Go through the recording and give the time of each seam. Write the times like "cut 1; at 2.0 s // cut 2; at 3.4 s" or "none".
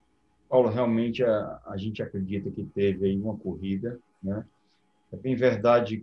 none